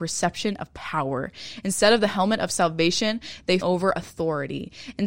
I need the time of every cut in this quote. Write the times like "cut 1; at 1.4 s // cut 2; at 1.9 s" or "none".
cut 1; at 3.6 s